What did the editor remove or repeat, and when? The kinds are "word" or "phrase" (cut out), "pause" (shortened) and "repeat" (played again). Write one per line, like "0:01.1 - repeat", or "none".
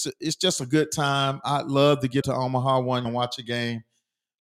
0:02.2 - word
0:03.0 - word